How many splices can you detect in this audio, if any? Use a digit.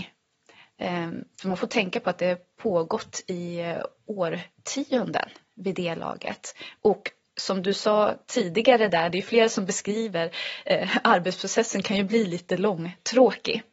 0